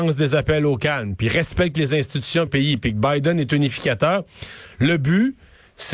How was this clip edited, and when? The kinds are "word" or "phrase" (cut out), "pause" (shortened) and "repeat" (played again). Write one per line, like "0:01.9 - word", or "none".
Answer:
0:02.5 - phrase